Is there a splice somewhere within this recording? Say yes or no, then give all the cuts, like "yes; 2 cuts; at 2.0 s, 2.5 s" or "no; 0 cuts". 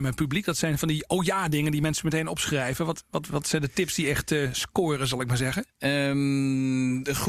no; 0 cuts